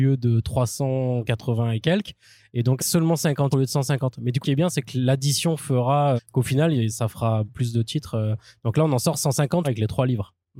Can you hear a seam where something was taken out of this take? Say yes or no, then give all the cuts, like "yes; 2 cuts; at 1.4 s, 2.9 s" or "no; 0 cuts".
yes; 7 cuts; at 2.8 s, 3.5 s, 4.4 s, 6.2 s, 6.9 s, 7.5 s, 9.6 s